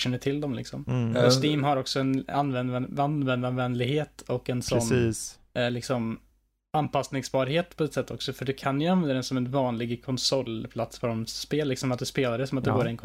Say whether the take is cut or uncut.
uncut